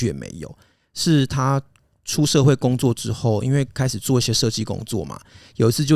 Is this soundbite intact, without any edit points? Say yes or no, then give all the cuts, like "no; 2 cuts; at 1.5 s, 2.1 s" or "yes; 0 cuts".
yes; 0 cuts